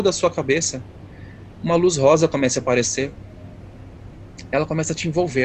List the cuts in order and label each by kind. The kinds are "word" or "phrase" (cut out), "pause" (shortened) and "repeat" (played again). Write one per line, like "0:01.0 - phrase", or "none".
none

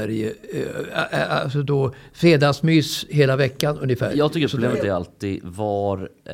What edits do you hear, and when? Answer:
none

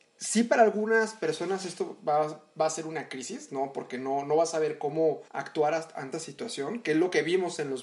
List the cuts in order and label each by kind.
0:05.3 - pause
0:06.1 - word

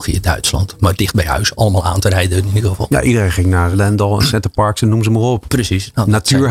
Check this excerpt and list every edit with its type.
0:03.7 - word

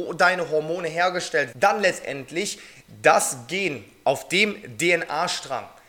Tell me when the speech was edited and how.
0:01.5 - word

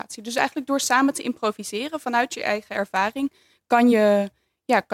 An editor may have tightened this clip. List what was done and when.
none

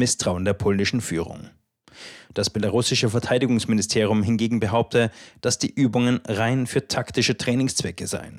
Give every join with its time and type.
none

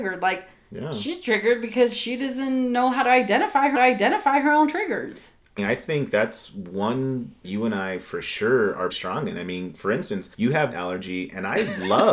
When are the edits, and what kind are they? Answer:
0:03.7 - repeat
0:05.6 - word
0:07.4 - phrase
0:08.9 - word
0:10.3 - pause
0:10.7 - phrase

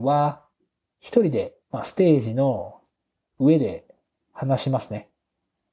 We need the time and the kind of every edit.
0:01.6 - pause

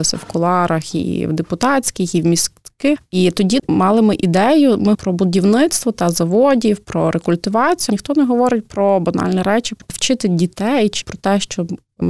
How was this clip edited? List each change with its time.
0:04.9 - word
0:07.9 - word
0:11.0 - word

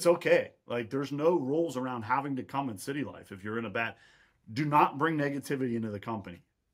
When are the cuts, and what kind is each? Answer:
none

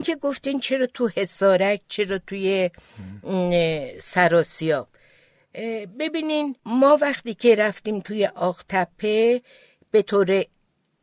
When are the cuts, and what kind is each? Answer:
0:06.6 - pause

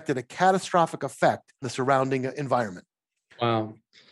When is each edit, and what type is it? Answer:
0:01.6 - word

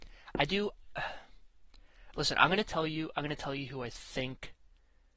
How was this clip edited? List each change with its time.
none

